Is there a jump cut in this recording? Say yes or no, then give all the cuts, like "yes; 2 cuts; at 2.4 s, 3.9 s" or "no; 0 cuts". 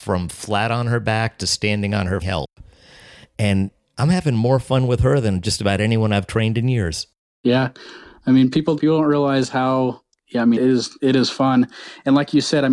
yes; 3 cuts; at 2.2 s, 8.8 s, 10.6 s